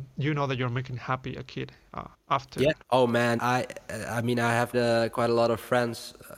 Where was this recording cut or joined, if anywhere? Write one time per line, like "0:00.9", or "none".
0:02.1
0:02.8
0:03.4
0:04.7